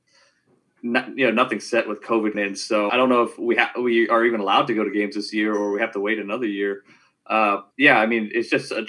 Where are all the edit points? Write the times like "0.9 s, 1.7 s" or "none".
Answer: 2.3 s, 2.9 s, 7.7 s